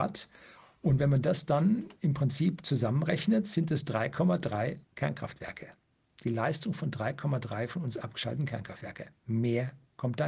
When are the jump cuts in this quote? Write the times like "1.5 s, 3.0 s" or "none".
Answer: 4.8 s